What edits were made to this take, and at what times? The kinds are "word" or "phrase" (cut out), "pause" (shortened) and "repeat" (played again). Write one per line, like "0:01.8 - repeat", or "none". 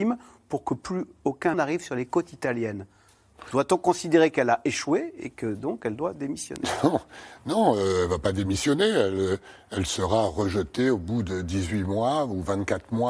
0:01.5 - word